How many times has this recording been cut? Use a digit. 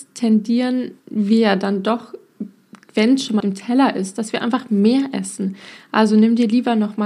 2